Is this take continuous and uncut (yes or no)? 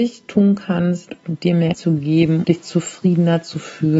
no